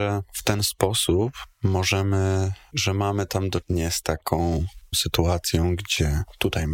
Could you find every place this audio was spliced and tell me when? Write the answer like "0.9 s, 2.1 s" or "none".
2.7 s, 3.6 s, 4.9 s